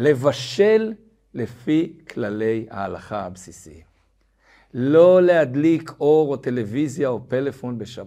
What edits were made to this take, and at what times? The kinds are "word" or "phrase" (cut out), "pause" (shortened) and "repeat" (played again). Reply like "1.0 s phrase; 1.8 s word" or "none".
none

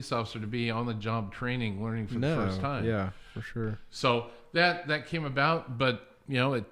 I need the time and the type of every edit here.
none

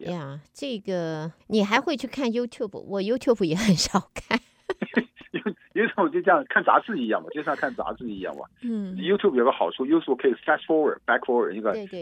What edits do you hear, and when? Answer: 1.4 s pause

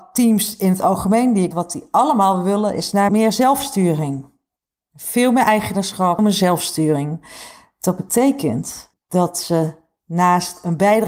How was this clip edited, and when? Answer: 1.5 s word; 3.1 s word; 6.2 s word; 8.9 s pause

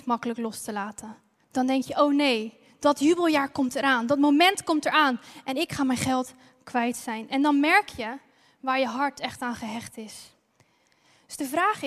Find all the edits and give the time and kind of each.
none

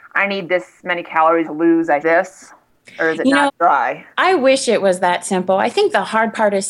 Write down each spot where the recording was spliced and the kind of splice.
1.4 s word; 2.0 s phrase; 3.5 s word; 4.1 s pause

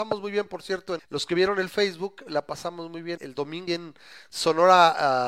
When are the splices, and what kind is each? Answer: 1.0 s word; 3.2 s word; 3.7 s word

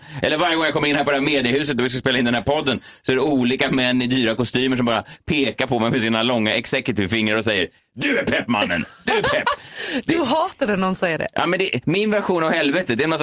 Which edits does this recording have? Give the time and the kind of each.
none

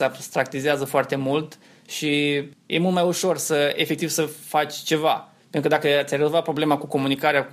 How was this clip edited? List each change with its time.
2.5 s pause

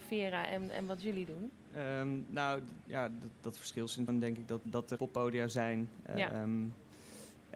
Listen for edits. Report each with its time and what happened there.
4.1 s word; 4.6 s word; 5.0 s word

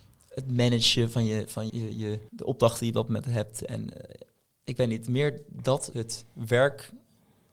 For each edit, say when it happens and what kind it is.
1.7 s word; 2.3 s pause; 5.9 s word

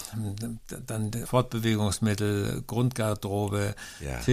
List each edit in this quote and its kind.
1.3 s word

